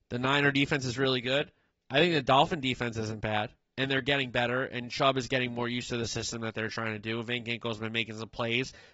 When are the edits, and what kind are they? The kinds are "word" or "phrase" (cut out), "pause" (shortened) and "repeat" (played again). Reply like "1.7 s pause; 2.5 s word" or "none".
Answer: 1.7 s pause